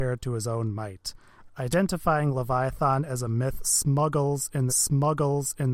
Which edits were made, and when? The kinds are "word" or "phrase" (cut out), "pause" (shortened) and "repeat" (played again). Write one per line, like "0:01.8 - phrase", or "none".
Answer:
0:04.7 - repeat